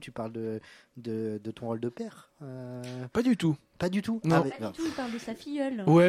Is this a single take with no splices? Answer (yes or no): yes